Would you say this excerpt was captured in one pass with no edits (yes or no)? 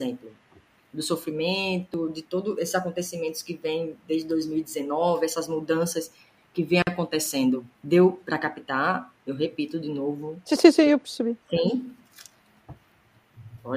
no